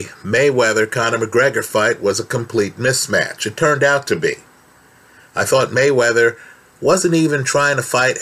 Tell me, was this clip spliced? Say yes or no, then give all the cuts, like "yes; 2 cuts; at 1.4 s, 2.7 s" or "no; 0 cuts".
no; 0 cuts